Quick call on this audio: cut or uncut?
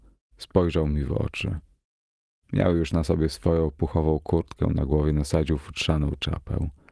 uncut